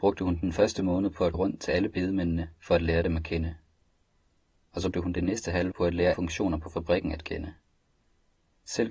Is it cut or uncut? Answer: cut